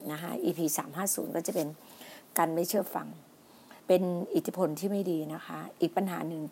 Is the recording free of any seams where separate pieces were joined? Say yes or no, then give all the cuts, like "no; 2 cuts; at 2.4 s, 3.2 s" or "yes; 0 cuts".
no; 1 cut; at 3.8 s